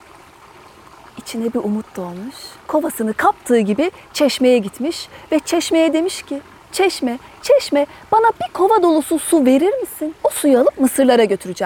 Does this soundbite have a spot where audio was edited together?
yes; 2 cuts; at 2.6 s, 10.2 s

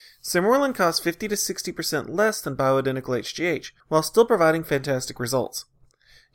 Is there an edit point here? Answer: yes; 1 cut; at 3.8 s

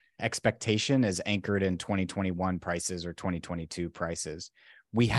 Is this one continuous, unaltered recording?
yes; 0 cuts

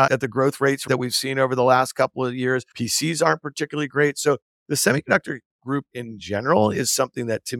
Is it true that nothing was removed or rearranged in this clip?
yes; 0 cuts

